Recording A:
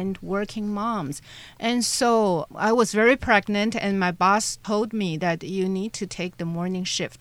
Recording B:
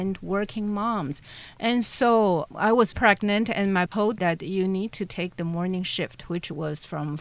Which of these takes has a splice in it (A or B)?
B